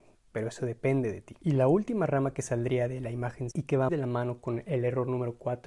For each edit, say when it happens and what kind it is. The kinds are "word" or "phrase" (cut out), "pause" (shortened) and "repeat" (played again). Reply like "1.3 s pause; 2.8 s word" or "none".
1.4 s pause; 3.5 s word; 3.9 s word